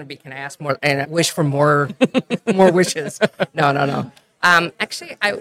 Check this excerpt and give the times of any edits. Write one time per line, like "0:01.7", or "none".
0:01.0